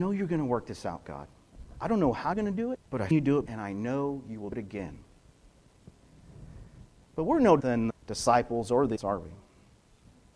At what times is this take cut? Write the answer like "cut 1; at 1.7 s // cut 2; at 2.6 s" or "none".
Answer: cut 1; at 2.3 s // cut 2; at 2.7 s // cut 3; at 3.1 s // cut 4; at 3.5 s // cut 5; at 4.5 s // cut 6; at 7.6 s // cut 7; at 7.9 s // cut 8; at 9.0 s